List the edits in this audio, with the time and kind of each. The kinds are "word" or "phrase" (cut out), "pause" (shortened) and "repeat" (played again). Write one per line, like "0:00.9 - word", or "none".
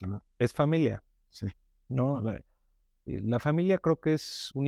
none